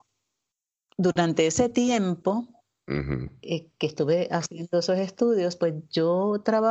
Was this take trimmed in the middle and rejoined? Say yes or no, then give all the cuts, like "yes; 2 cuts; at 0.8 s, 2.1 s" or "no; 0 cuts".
no; 0 cuts